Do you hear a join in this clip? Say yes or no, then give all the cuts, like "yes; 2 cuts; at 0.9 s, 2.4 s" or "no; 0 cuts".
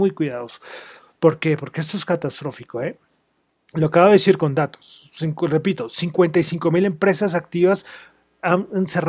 no; 0 cuts